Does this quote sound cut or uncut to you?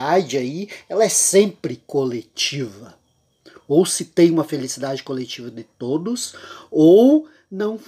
uncut